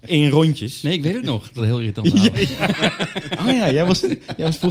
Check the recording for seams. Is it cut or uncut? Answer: cut